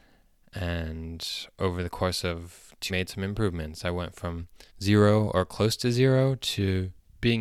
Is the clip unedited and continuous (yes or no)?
no